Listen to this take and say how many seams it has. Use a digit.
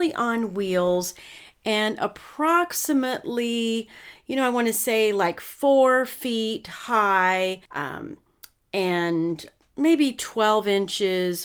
1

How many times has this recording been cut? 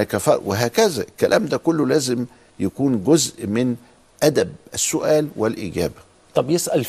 0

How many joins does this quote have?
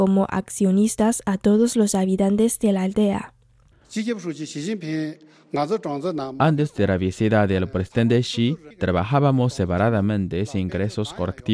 1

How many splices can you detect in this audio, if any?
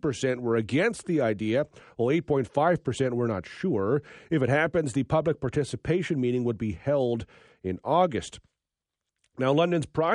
0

